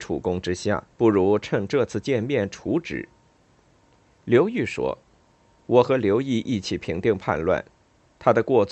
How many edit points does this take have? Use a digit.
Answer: 1